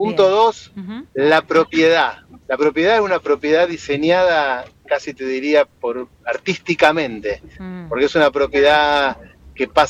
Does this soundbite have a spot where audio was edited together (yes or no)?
yes